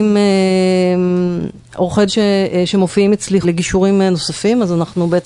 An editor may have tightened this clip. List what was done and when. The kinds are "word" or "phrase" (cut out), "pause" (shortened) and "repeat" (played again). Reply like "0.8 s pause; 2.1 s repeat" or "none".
2.1 s word; 3.4 s word